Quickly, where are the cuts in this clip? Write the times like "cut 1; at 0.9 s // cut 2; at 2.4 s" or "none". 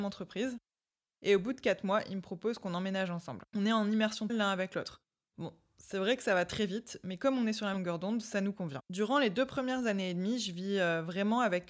cut 1; at 3.5 s // cut 2; at 4.3 s // cut 3; at 7.7 s // cut 4; at 8.9 s